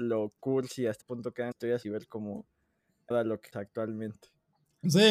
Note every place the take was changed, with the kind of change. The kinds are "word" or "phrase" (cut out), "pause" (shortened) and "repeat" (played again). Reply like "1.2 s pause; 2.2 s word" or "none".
1.0 s word; 1.5 s word; 1.8 s word; 3.1 s word; 3.5 s word